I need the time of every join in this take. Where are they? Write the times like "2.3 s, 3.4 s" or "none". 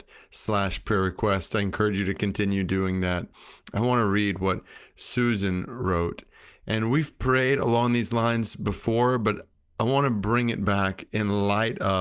none